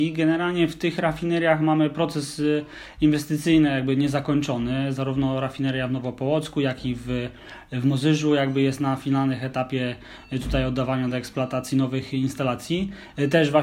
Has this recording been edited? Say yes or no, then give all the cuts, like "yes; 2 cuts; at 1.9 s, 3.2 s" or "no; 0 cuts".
no; 0 cuts